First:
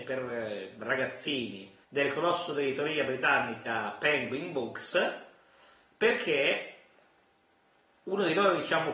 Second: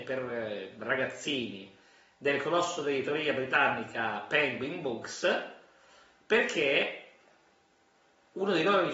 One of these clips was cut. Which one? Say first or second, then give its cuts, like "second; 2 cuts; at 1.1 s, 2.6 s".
first; 1 cut; at 1.8 s